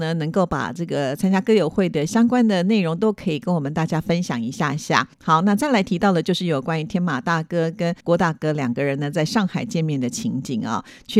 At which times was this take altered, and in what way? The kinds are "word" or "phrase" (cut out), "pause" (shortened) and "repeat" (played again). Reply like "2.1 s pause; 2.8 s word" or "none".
5.1 s pause; 8.0 s pause

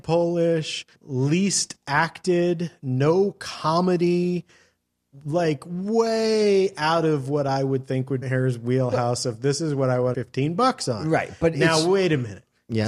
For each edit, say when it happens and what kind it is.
0.9 s pause; 8.2 s phrase; 10.1 s phrase

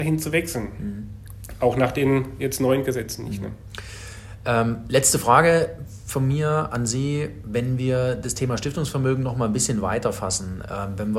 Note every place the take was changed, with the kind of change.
none

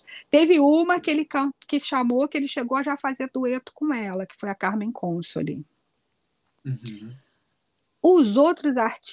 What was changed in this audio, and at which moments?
none

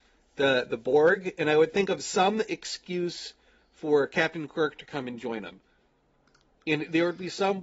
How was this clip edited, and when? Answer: none

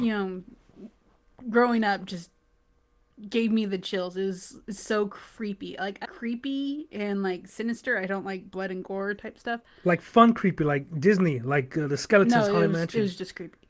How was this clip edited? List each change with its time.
6.0 s word

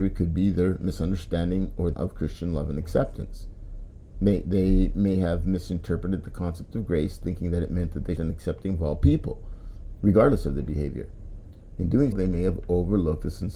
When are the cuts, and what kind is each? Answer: 1.9 s word; 8.2 s phrase; 12.1 s word

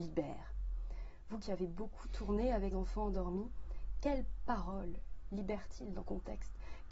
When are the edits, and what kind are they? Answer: 2.7 s word; 6.0 s word

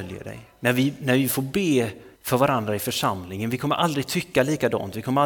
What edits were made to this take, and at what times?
2.1 s pause

